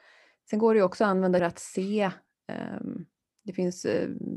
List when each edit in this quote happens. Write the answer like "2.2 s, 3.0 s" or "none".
1.4 s